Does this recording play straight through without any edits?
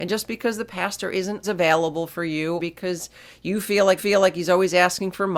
no; 3 cuts; at 1.4 s, 2.6 s, 4.0 s

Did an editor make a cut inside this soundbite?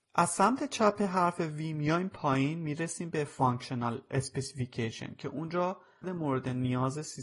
yes; 1 cut; at 6.0 s

